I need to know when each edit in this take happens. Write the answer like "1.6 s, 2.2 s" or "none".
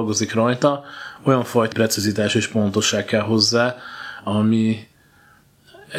1.7 s